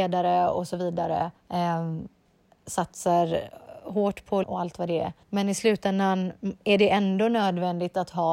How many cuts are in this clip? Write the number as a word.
three